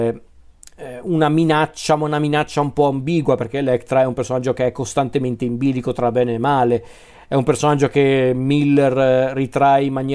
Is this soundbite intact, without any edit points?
yes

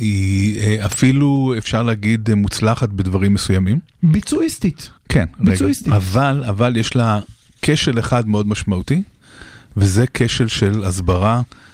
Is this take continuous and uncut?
yes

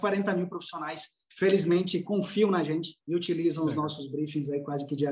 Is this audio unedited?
no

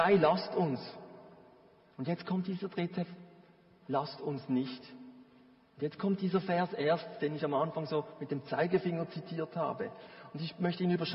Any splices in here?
no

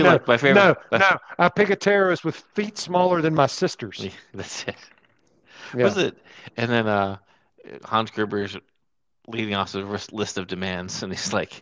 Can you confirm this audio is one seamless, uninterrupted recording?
yes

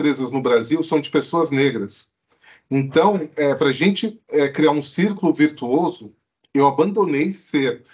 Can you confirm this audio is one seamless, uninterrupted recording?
yes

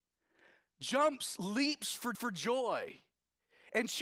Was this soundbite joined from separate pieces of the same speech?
yes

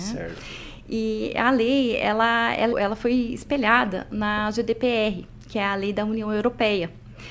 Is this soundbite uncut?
no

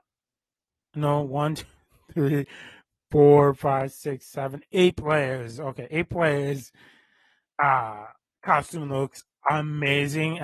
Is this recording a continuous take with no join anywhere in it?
yes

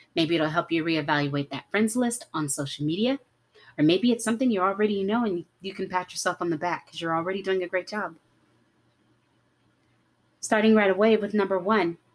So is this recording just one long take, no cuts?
yes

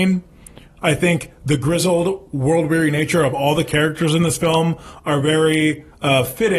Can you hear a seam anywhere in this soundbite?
no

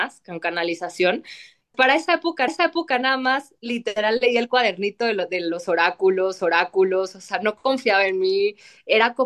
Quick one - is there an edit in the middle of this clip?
yes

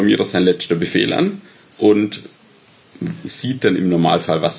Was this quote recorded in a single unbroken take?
no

